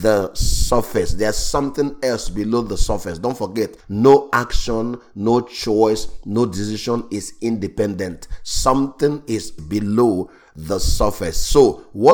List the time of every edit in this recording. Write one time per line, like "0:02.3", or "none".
0:03.8
0:09.6